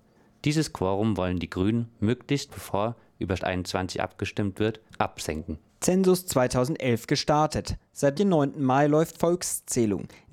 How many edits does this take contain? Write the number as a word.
five